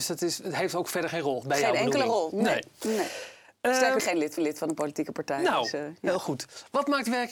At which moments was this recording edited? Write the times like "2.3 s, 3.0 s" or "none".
1.4 s, 4.0 s, 4.4 s